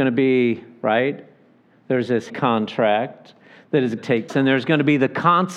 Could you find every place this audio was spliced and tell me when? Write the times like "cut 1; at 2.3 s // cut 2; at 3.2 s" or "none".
cut 1; at 2.3 s // cut 2; at 4.0 s // cut 3; at 4.3 s

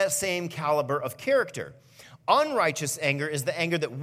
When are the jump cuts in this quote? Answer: none

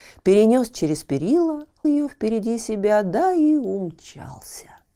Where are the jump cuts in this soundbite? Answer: cut 1; at 1.8 s

